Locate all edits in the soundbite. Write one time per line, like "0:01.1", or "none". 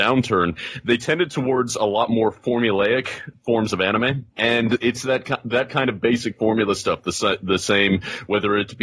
0:04.3